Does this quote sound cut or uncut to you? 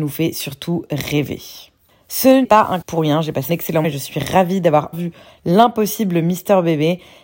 cut